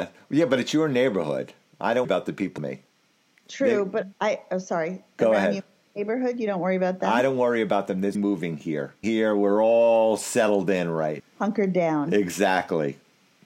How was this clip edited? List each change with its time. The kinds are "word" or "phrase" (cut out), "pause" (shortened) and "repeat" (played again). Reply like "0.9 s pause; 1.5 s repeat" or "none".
2.0 s word; 2.6 s word; 4.1 s word; 8.1 s word; 9.0 s phrase; 11.2 s word